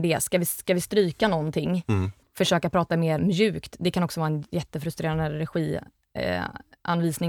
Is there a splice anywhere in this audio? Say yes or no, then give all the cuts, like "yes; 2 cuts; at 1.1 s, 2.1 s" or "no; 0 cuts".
yes; 1 cut; at 3.2 s